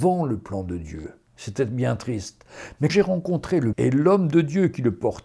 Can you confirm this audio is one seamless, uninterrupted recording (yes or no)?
no